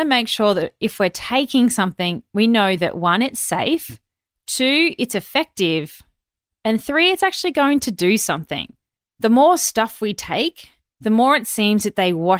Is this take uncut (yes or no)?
yes